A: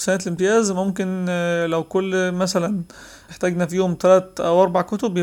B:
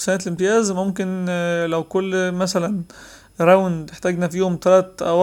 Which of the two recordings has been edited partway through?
A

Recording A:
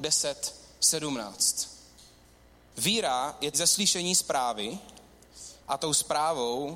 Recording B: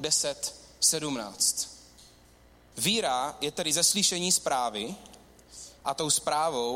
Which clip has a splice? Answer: A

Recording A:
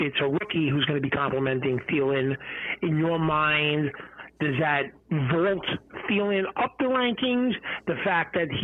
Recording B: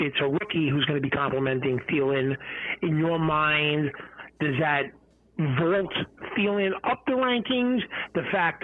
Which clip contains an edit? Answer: A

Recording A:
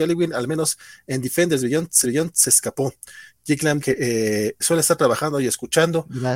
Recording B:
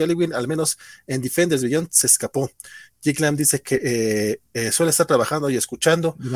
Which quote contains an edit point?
A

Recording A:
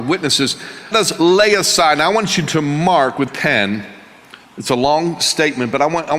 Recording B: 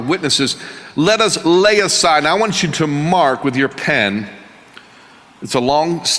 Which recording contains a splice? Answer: A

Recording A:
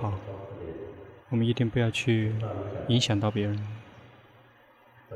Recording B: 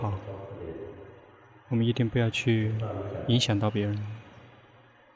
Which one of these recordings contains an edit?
A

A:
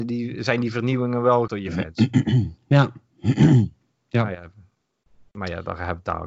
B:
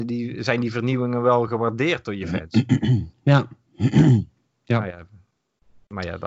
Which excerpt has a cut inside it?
A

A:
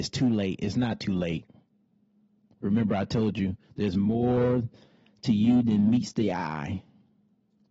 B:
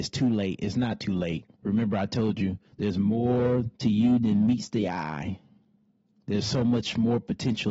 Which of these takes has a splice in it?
B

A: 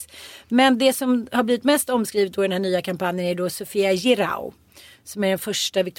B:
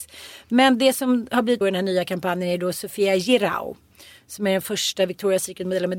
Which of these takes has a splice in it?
B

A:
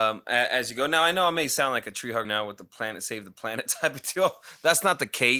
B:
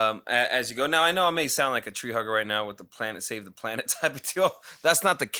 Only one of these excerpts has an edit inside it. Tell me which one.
A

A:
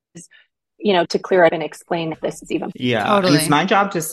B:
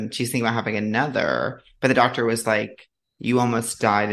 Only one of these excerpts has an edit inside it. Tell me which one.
A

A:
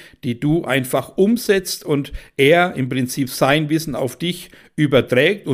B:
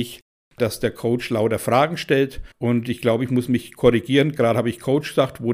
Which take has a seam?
B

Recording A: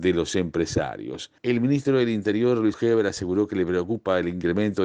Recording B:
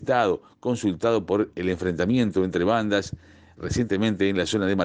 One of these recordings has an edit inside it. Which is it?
A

